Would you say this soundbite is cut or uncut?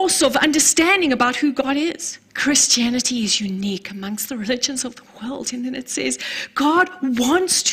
cut